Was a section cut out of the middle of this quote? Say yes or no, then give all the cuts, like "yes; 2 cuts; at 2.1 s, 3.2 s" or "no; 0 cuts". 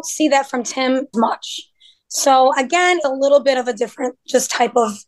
yes; 2 cuts; at 1.1 s, 3.0 s